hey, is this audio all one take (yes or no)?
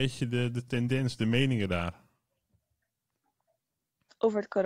yes